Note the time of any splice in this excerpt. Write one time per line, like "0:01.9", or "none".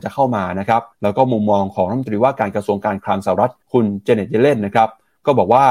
0:00.9
0:03.6

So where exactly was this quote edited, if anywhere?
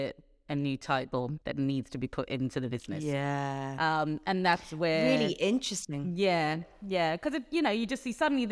0:01.4

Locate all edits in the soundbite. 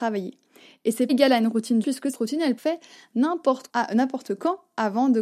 0:01.1
0:01.8
0:02.1
0:02.6
0:03.7

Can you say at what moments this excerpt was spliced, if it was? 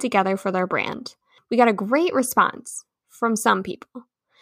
none

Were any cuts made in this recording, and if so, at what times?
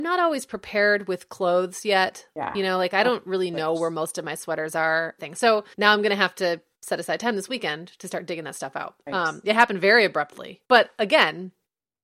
0:05.2
0:05.7
0:10.6

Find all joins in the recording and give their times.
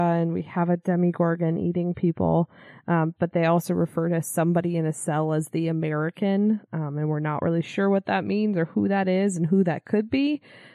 0:06.6

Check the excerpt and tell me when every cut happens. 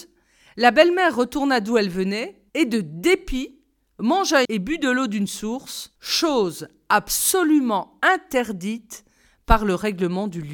0:02.5
0:04.4
0:06.0

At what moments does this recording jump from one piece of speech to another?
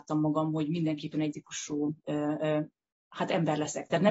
0:01.3

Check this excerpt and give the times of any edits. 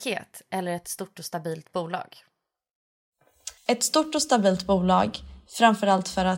0:03.6

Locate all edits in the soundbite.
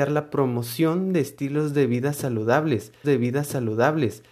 0:03.0

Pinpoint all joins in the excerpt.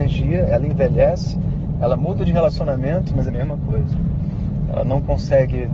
0:03.3

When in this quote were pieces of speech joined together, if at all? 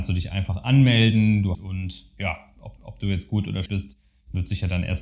0:01.5
0:02.8
0:03.7

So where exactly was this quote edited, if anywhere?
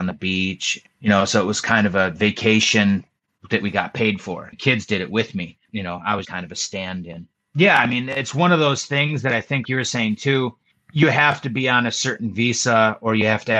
0:04.5
0:05.7
0:06.2
0:09.6

